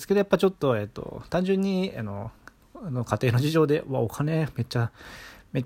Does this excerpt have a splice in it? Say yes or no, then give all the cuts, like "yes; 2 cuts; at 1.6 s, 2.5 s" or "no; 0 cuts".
no; 0 cuts